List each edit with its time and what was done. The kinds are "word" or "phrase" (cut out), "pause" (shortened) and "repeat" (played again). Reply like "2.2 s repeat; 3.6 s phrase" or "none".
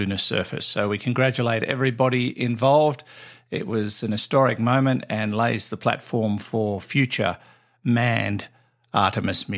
none